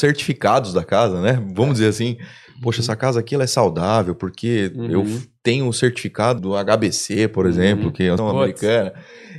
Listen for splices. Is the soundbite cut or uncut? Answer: cut